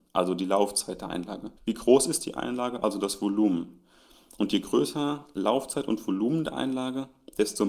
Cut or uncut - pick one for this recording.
cut